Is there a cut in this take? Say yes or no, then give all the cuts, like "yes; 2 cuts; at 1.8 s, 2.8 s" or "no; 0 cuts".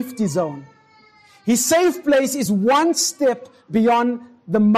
no; 0 cuts